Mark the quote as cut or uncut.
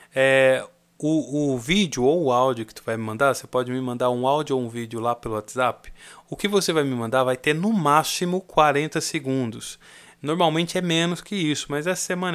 uncut